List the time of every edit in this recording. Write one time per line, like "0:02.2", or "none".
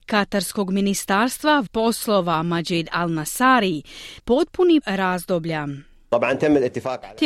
0:01.7
0:04.2
0:04.8